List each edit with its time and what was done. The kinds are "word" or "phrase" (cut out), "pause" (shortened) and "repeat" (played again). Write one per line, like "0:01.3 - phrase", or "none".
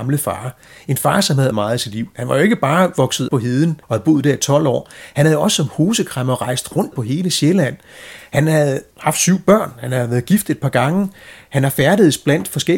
0:01.5 - word
0:03.3 - word
0:03.8 - pause
0:06.9 - phrase
0:08.9 - pause